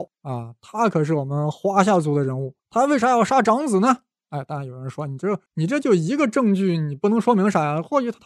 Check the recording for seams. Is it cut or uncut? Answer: cut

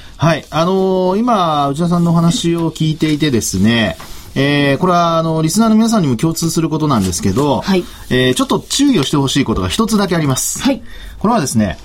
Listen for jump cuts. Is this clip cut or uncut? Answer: uncut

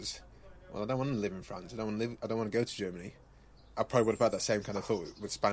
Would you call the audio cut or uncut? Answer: uncut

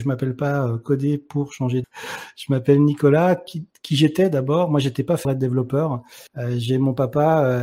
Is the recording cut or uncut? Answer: cut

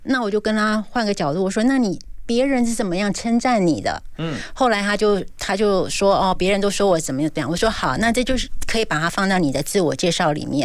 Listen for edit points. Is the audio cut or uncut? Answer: uncut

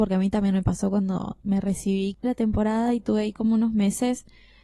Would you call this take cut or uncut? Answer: cut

